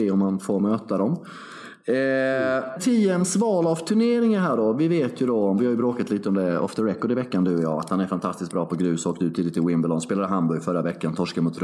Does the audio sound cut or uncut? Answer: cut